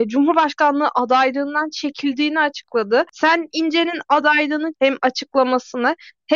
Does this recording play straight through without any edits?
no; 2 cuts; at 3.5 s, 4.7 s

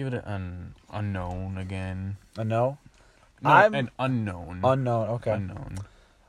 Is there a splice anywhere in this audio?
no; 0 cuts

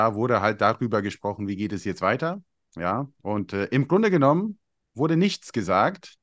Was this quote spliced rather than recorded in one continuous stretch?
no; 0 cuts

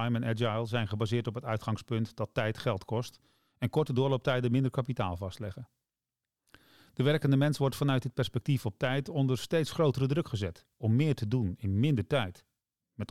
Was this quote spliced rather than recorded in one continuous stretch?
no; 0 cuts

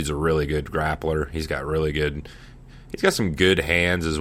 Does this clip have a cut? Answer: no; 0 cuts

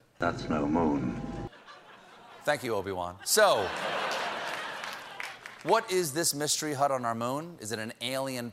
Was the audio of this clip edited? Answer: no; 0 cuts

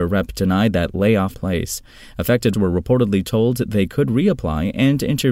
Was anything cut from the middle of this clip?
yes; 2 cuts; at 1.3 s, 2.5 s

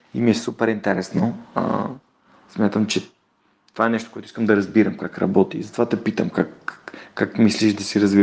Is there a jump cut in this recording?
no; 0 cuts

